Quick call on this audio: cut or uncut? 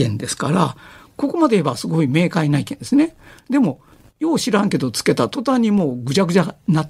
uncut